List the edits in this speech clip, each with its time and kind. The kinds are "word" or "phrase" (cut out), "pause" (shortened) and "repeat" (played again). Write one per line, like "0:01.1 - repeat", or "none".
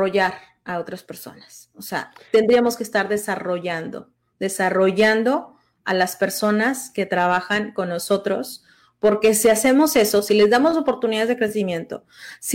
none